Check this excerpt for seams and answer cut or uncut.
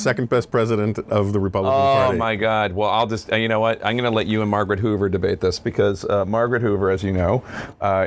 uncut